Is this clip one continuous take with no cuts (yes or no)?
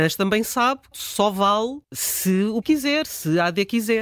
no